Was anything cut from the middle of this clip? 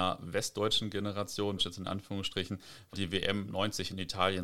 yes; 2 cuts; at 1.6 s, 2.9 s

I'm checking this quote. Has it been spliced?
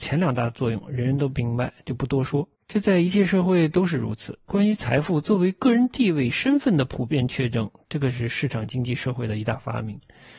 yes; 2 cuts; at 2.6 s, 4.4 s

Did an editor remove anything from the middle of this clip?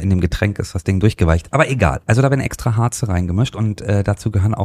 no; 0 cuts

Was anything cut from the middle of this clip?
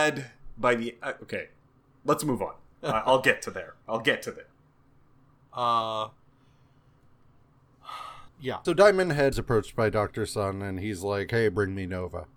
yes; 4 cuts; at 2.7 s, 8.3 s, 8.6 s, 9.3 s

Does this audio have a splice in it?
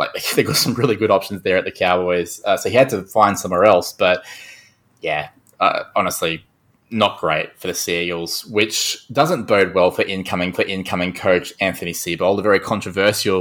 yes; 1 cut; at 10.5 s

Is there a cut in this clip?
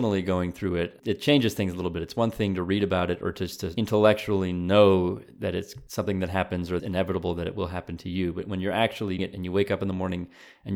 yes; 2 cuts; at 6.8 s, 9.2 s

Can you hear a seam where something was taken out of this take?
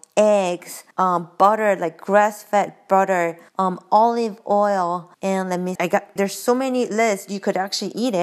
yes; 5 cuts; at 0.9 s, 3.5 s, 5.1 s, 5.8 s, 6.2 s

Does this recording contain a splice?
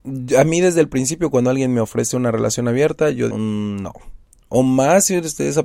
yes; 1 cut; at 3.3 s

